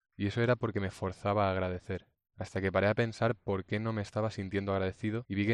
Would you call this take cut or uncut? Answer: uncut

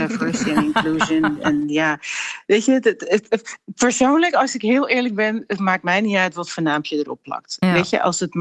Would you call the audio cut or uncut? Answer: uncut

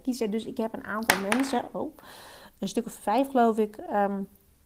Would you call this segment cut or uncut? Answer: uncut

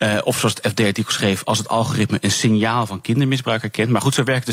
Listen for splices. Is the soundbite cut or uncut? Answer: uncut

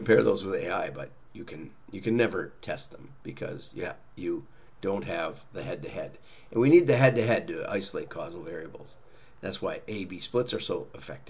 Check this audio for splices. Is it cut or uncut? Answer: uncut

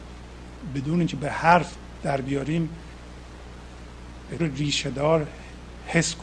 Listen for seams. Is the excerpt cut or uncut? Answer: cut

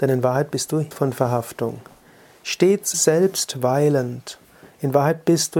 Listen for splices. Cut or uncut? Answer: cut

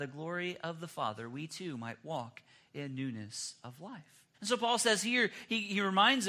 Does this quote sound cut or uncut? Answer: cut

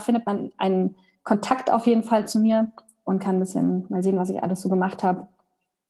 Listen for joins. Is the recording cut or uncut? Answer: uncut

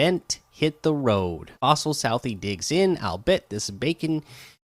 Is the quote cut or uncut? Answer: cut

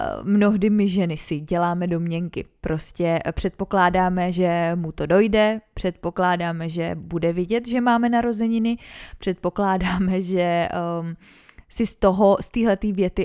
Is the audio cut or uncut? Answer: uncut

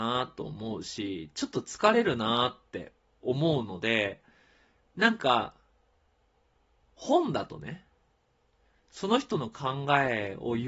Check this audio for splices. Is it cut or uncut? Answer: uncut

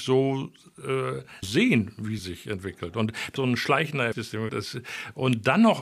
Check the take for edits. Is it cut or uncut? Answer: cut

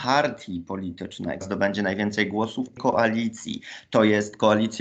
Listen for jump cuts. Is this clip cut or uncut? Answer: cut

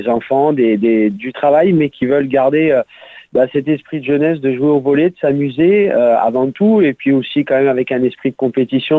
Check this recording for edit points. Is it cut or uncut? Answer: uncut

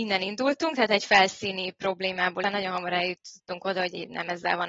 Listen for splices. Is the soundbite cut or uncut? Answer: cut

